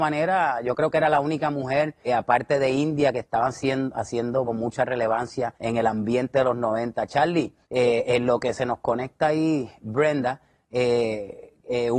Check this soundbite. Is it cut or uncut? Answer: cut